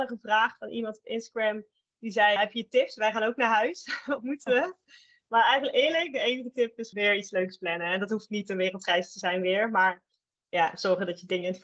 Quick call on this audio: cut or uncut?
cut